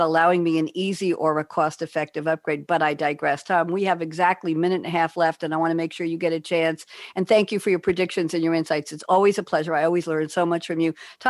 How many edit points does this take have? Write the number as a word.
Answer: zero